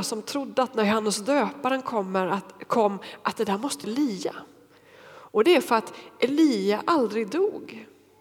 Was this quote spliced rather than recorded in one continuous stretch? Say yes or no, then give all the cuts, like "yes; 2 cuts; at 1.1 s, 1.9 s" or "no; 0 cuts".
yes; 1 cut; at 3.8 s